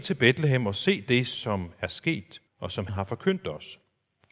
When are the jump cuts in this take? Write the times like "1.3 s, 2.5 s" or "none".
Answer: 2.5 s, 2.9 s